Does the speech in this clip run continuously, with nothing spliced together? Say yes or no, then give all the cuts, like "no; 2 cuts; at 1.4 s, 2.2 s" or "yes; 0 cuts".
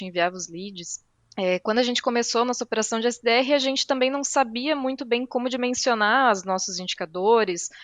no; 1 cut; at 1.2 s